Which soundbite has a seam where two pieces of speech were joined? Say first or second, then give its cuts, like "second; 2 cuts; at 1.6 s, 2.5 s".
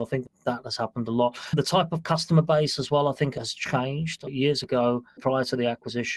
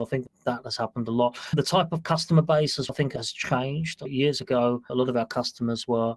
second; 2 cuts; at 2.9 s, 4.9 s